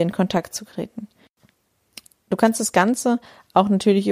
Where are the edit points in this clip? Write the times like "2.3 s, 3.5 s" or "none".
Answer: none